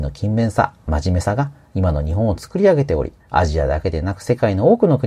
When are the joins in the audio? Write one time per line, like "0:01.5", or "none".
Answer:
0:03.2

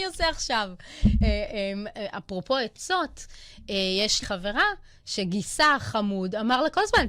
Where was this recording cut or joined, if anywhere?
0:04.2

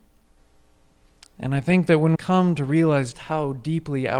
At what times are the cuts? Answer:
0:02.1
0:03.1

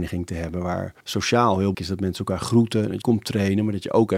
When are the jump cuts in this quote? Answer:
0:01.0
0:01.7
0:03.0

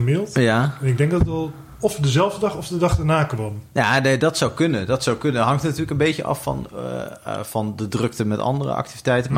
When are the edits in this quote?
none

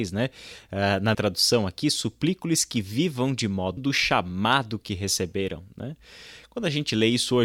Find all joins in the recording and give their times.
0:01.1
0:03.8

